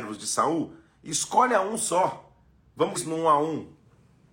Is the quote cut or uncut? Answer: cut